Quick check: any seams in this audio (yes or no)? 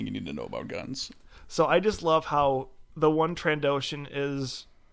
yes